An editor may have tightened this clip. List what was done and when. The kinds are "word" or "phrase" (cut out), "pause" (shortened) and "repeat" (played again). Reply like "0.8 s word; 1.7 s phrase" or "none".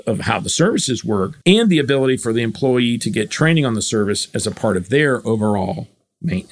1.4 s pause